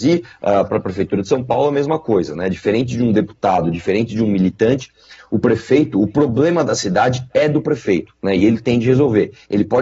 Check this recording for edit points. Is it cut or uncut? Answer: uncut